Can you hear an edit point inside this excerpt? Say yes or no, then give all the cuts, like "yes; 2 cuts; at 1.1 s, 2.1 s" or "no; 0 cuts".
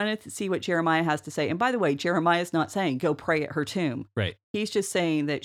no; 0 cuts